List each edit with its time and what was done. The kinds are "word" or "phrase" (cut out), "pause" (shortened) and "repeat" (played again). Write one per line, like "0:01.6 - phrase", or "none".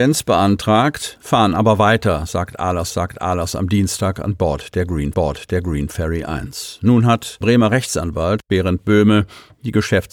0:02.9 - repeat
0:05.1 - repeat
0:07.4 - word